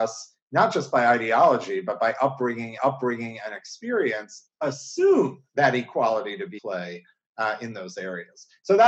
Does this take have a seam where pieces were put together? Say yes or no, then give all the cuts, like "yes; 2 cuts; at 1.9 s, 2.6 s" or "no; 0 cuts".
yes; 3 cuts; at 2.8 s, 5.5 s, 6.6 s